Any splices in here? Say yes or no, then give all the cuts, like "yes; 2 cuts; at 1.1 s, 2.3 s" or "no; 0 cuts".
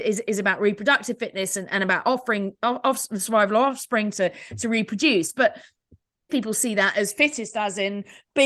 yes; 1 cut; at 6.3 s